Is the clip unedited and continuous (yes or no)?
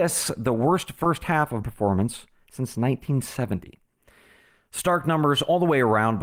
no